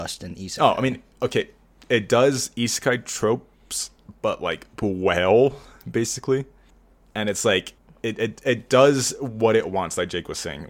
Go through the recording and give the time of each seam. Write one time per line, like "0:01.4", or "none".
0:04.7
0:06.7
0:07.8

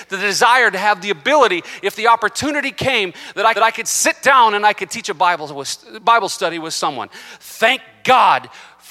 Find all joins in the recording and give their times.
0:03.6

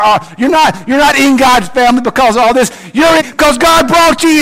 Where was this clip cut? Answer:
0:03.2

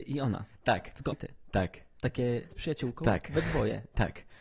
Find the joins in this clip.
0:01.1
0:02.5

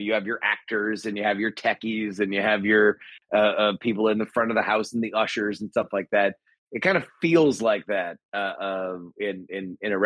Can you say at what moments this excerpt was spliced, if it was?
none

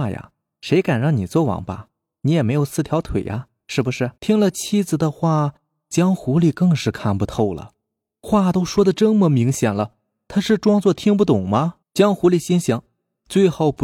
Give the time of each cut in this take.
0:04.2
0:11.8

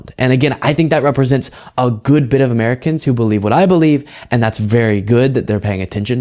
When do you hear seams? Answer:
none

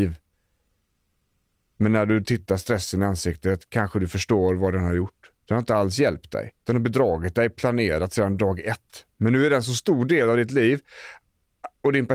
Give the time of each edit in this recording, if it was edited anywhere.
0:05.4
0:06.6

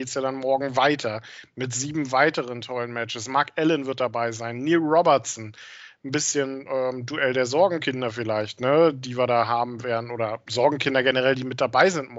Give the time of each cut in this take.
none

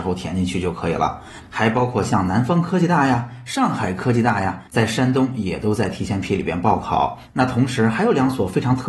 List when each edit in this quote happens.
0:04.7

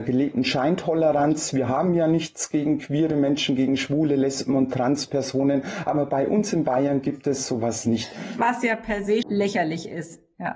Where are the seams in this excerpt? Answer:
0:09.2

